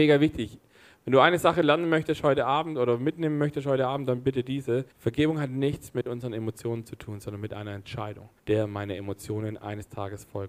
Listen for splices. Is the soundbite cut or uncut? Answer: cut